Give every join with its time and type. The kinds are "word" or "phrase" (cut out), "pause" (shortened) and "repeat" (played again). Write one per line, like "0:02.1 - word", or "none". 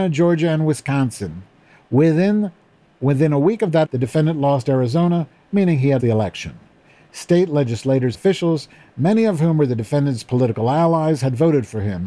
0:03.8 - word
0:06.0 - word
0:08.1 - word